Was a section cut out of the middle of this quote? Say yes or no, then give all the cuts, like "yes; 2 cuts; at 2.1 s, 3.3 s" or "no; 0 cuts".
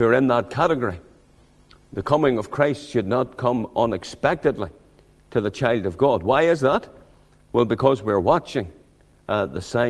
no; 0 cuts